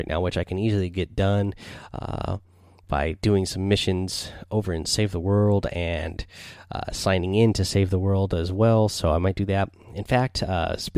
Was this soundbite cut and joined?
no; 0 cuts

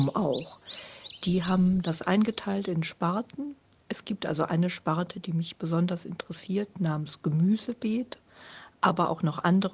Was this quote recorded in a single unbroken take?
yes; 0 cuts

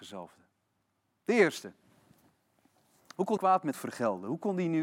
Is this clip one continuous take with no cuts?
no; 2 cuts; at 3.4 s, 3.7 s

